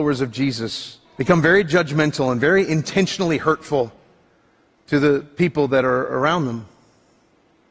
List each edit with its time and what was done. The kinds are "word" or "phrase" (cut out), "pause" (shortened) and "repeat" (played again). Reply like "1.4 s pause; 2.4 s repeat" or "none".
1.1 s pause